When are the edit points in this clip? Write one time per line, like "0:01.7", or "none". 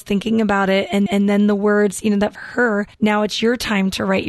0:01.1
0:02.3
0:02.9